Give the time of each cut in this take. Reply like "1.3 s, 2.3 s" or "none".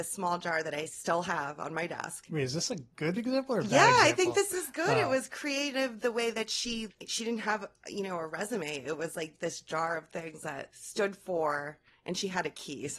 6.9 s